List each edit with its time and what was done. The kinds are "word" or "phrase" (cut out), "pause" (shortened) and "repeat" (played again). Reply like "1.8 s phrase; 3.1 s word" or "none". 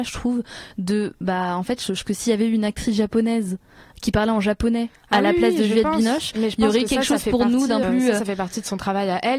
2.0 s word; 7.8 s word